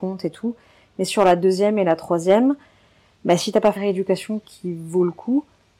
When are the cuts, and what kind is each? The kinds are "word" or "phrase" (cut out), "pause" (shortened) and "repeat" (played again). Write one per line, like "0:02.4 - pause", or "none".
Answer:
0:03.8 - word